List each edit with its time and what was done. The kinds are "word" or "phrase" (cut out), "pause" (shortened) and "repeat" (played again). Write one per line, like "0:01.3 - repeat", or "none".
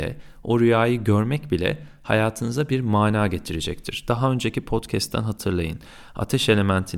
none